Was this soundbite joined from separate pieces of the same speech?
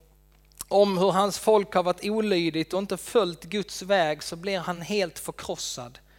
no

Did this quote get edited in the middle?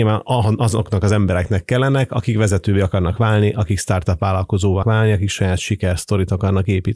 yes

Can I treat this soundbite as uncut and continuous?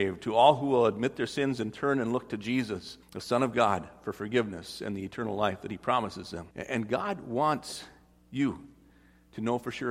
no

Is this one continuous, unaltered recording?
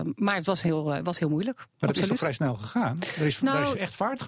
no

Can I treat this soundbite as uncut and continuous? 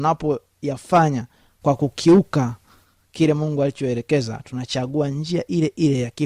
yes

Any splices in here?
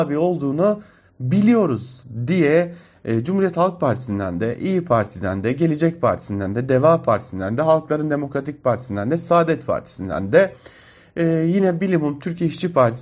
no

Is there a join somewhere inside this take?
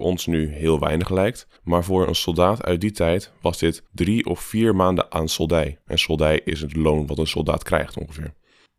yes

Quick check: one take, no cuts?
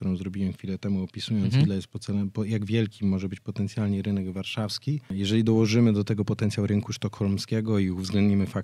yes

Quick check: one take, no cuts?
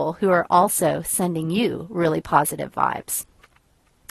yes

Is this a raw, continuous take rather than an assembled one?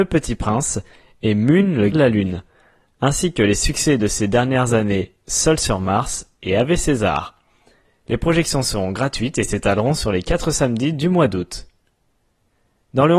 no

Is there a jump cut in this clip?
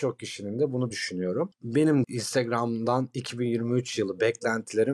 yes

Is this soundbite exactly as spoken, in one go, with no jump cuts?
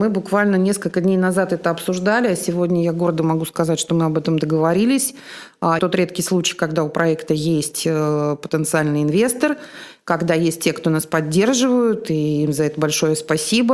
no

